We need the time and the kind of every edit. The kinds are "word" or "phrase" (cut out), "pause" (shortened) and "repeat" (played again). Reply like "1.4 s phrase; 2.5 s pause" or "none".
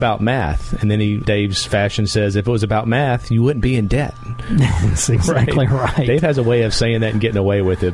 1.2 s word